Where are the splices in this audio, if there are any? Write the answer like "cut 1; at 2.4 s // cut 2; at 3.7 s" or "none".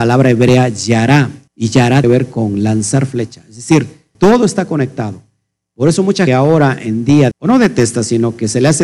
cut 1; at 1.5 s // cut 2; at 2.0 s // cut 3; at 4.1 s // cut 4; at 6.3 s // cut 5; at 7.3 s